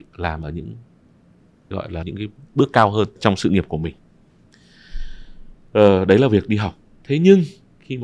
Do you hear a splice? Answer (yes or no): yes